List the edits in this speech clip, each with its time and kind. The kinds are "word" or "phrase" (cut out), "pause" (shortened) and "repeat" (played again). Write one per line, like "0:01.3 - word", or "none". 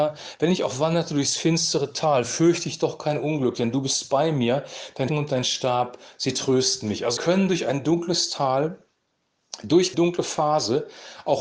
0:05.1 - word
0:07.2 - word
0:09.9 - word